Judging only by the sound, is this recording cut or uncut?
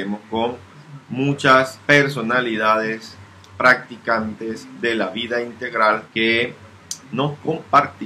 cut